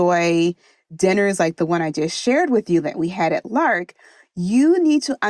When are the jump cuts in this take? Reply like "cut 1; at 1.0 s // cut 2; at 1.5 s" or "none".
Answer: none